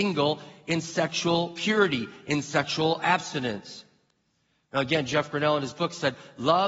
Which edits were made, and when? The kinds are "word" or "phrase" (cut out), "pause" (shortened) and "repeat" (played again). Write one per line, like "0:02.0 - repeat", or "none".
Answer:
none